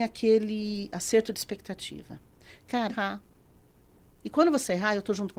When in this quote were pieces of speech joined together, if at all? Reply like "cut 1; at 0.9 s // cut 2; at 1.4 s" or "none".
cut 1; at 2.9 s

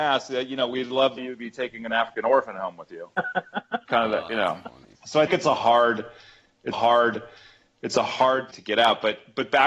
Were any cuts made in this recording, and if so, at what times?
cut 1; at 1.2 s // cut 2; at 5.0 s // cut 3; at 5.3 s // cut 4; at 6.7 s // cut 5; at 8.5 s

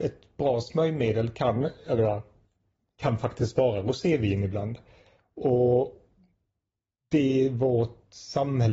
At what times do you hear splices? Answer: none

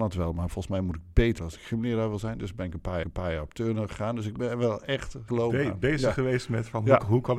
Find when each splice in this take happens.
cut 1; at 1.4 s // cut 2; at 3.0 s // cut 3; at 5.3 s

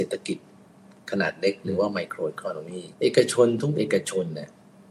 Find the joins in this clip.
cut 1; at 2.9 s

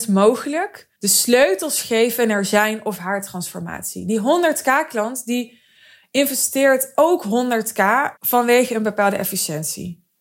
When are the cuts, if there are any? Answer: cut 1; at 0.9 s // cut 2; at 8.2 s

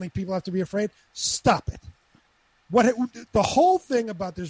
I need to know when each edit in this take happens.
cut 1; at 3.3 s

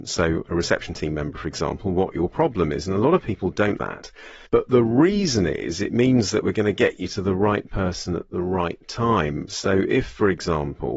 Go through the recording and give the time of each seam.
cut 1; at 3.8 s // cut 2; at 4.4 s

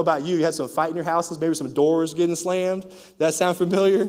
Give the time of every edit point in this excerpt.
none

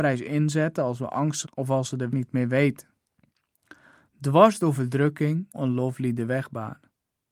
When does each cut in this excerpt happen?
cut 1; at 1.4 s // cut 2; at 2.1 s // cut 3; at 5.5 s

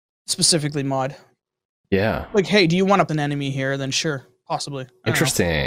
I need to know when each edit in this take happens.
cut 1; at 3.1 s // cut 2; at 4.3 s

